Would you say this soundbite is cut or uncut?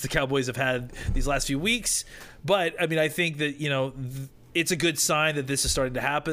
uncut